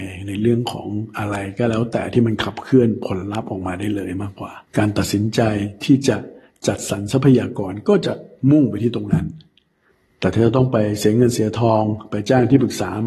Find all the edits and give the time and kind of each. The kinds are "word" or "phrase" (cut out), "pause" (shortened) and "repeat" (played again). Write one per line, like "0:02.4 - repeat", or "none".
0:04.7 - pause